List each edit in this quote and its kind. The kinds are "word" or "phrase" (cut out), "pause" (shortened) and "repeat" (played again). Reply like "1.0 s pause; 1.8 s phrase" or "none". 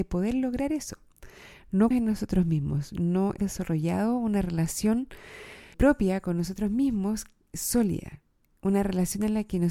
1.9 s word; 3.4 s word; 5.7 s word

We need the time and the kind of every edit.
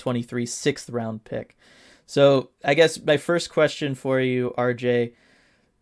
none

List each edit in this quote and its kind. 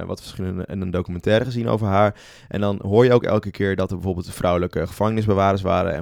none

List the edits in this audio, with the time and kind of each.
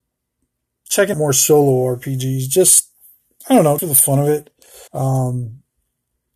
1.1 s word; 3.8 s word; 4.9 s pause

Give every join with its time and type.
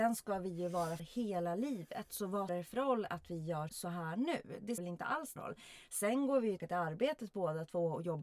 1.0 s word; 2.5 s word; 3.7 s word; 4.8 s word; 5.4 s word; 6.6 s word

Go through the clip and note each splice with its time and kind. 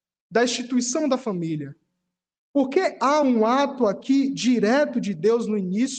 none

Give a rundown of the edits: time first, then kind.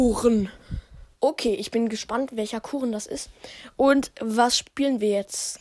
1.1 s pause

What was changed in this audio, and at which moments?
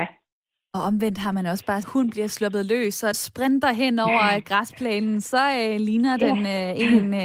1.8 s phrase; 3.1 s word

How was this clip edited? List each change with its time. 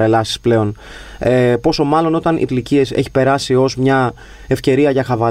2.5 s phrase

